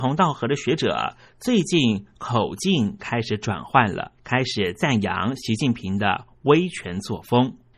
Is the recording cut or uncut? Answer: cut